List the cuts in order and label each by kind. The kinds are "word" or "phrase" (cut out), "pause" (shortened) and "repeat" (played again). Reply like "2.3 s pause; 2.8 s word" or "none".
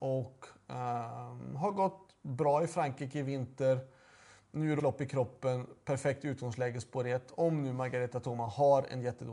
4.8 s word